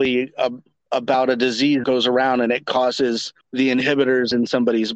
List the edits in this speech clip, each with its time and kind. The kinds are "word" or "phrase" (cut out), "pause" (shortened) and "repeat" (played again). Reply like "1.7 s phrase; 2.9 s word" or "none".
1.8 s word; 3.4 s pause